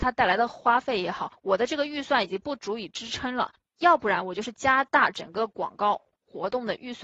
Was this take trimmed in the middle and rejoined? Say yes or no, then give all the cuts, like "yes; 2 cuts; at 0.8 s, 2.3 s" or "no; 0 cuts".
no; 0 cuts